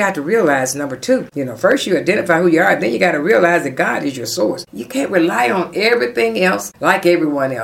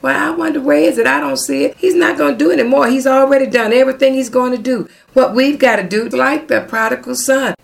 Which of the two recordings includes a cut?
second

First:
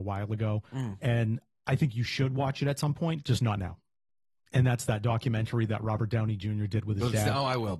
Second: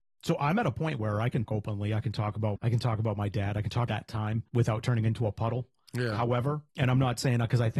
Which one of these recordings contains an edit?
second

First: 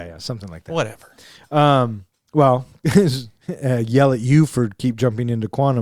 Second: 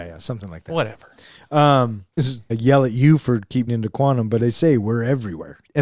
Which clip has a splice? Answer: second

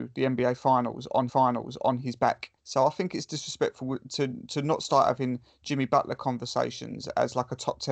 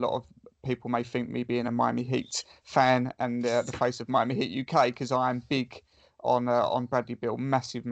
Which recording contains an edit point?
first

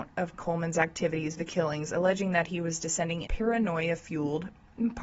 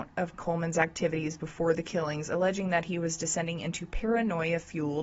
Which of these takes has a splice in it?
first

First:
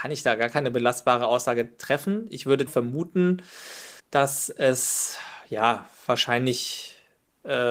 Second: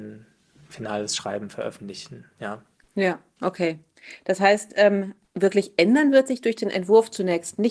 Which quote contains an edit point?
first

